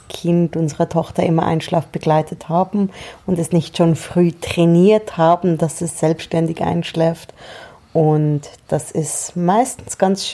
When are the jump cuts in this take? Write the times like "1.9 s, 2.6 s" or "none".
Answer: none